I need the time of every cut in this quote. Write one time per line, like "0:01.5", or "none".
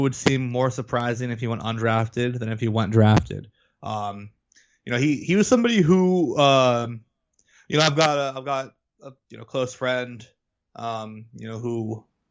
none